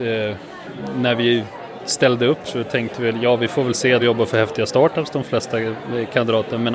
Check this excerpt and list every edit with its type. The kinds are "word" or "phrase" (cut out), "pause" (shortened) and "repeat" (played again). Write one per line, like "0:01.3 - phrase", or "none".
0:02.4 - word
0:04.0 - phrase